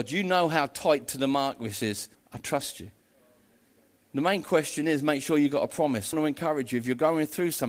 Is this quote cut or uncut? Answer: cut